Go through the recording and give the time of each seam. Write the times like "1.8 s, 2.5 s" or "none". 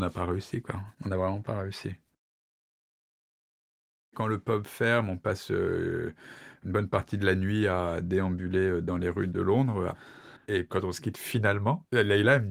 0.9 s, 10.4 s

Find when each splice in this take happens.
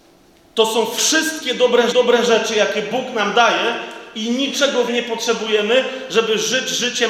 1.9 s, 4.9 s

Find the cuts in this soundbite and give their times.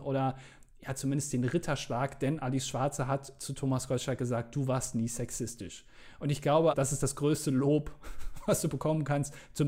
6.7 s

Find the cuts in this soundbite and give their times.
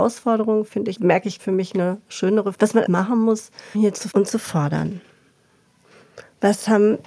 0.9 s, 1.4 s, 2.5 s, 2.9 s, 3.7 s, 4.1 s

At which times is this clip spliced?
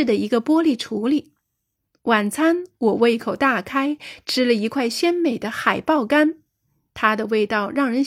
none

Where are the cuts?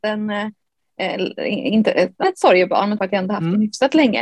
2.2 s, 3.0 s

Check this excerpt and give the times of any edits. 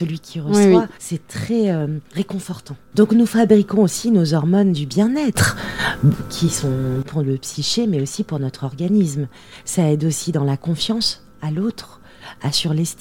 0.9 s, 2.1 s, 7.0 s

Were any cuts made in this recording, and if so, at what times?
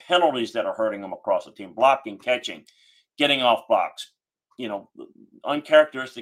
none

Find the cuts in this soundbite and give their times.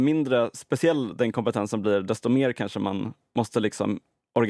none

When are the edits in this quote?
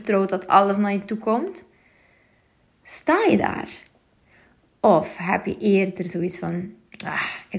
none

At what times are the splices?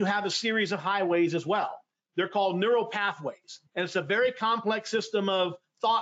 3.7 s

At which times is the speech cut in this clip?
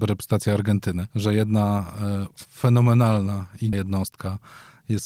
1.1 s, 3.7 s

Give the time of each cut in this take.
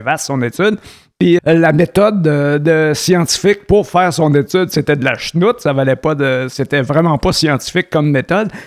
1.4 s

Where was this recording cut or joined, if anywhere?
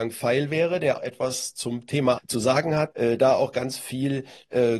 1.0 s, 2.2 s, 2.9 s

